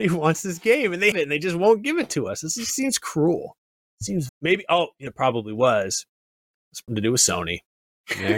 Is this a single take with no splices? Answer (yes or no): no